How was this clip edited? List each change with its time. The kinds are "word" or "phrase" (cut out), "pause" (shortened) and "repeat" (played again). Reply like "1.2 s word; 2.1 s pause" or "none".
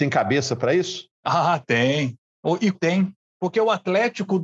1.1 s pause; 2.7 s word